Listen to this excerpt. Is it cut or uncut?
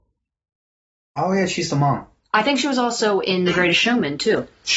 uncut